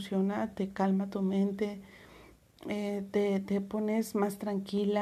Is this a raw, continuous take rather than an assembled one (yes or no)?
yes